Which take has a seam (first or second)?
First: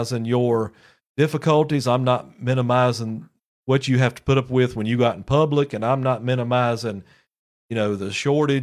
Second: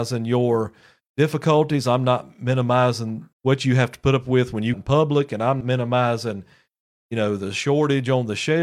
second